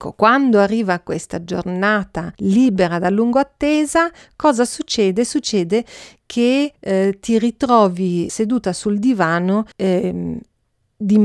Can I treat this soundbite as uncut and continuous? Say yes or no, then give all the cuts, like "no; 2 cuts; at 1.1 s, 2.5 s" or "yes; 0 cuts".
no; 4 cuts; at 2.3 s, 6.7 s, 8.3 s, 9.7 s